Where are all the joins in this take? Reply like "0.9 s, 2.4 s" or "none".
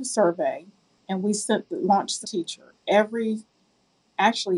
2.2 s